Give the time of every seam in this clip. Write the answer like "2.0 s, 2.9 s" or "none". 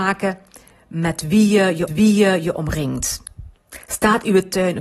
1.9 s